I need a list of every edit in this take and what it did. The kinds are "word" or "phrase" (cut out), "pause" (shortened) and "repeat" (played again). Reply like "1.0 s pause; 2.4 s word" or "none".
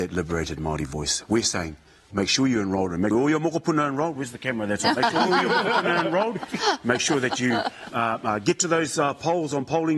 2.1 s word; 3.1 s word; 7.9 s word

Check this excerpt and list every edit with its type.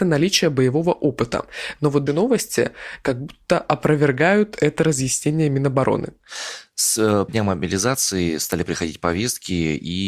2.1 s word; 7.3 s word

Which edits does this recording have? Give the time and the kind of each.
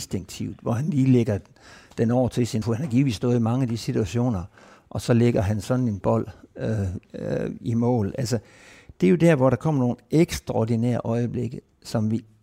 2.6 s word; 6.0 s word; 7.0 s word

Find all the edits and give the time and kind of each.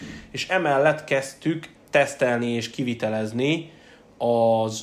1.7 s word

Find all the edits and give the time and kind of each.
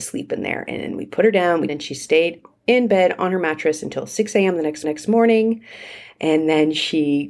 1.7 s phrase; 4.8 s repeat

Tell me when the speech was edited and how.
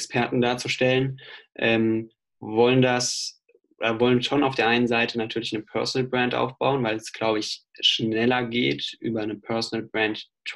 none

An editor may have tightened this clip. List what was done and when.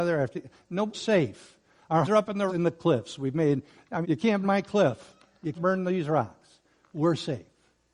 0.9 s word; 2.0 s word; 2.5 s word; 4.0 s word; 4.4 s word; 5.5 s word

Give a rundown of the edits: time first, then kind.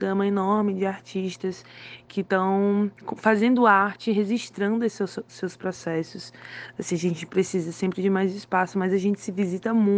none

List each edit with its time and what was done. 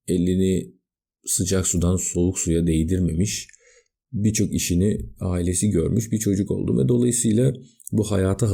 none

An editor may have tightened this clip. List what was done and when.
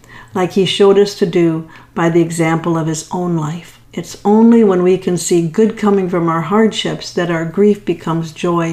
3.8 s pause

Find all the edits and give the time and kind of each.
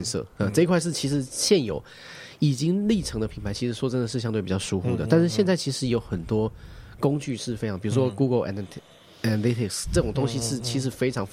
none

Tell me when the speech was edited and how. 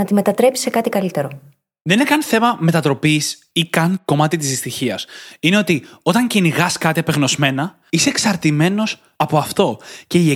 none

